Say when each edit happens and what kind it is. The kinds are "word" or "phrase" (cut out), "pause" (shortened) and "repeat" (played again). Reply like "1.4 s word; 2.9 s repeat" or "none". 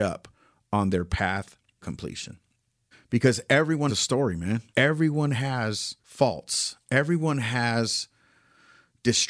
1.8 s word; 2.9 s pause; 3.9 s word; 4.7 s pause; 6.0 s pause

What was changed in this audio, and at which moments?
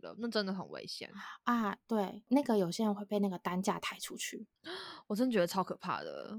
4.5 s pause

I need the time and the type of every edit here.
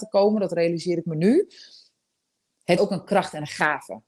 2.8 s word

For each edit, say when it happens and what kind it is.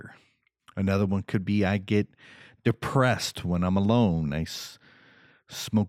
none

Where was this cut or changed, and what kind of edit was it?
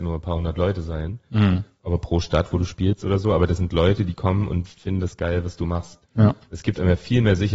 6.1 s pause

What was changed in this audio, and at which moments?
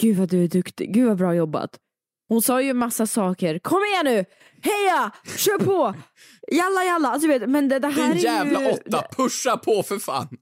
none

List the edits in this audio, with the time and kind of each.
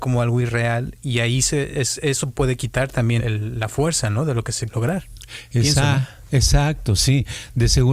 3.2 s word; 4.7 s word

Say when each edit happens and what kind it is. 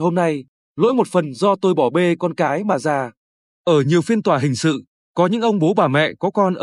none

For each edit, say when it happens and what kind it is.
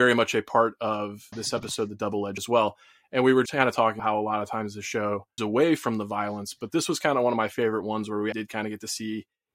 1.3 s word; 2.4 s word; 3.5 s word; 4.0 s word; 5.4 s word; 8.3 s word

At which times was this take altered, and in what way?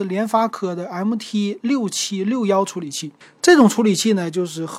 3.2 s pause

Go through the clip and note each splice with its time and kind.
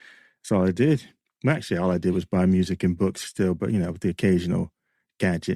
none

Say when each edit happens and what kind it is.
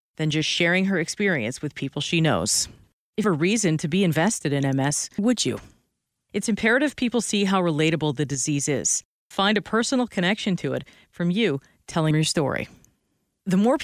3.2 s phrase; 5.2 s word; 9.3 s word; 12.1 s word

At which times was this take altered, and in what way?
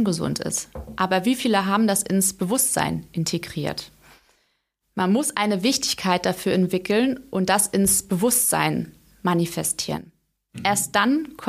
none

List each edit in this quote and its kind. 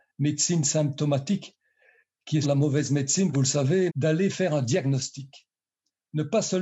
2.4 s word; 3.3 s word; 3.9 s word

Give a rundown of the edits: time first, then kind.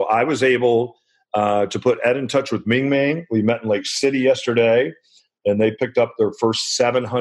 none

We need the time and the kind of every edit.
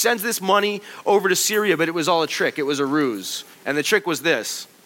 3.5 s pause

